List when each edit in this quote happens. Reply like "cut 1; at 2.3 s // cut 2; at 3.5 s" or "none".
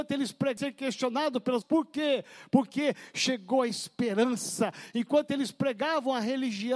cut 1; at 1.6 s